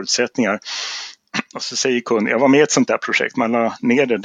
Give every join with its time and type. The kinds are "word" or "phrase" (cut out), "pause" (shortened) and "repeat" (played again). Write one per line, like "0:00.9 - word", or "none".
none